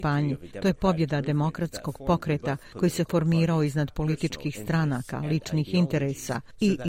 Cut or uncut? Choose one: uncut